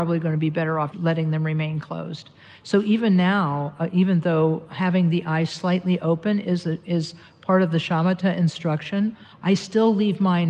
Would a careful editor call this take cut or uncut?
cut